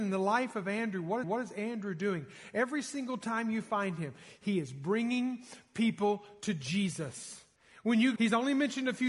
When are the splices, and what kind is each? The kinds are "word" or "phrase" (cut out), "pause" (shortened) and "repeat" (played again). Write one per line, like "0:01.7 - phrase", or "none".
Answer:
0:01.2 - repeat
0:07.6 - pause
0:08.2 - word